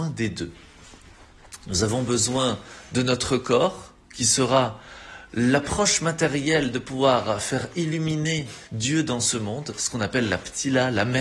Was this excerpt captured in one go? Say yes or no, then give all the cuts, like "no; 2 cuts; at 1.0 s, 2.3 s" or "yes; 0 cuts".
no; 1 cut; at 8.7 s